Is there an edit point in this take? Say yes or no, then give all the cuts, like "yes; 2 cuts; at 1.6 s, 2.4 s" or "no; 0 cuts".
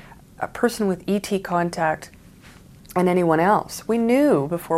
no; 0 cuts